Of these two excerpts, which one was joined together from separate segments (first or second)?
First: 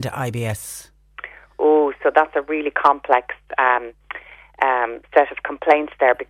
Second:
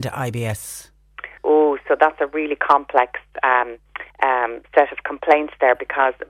second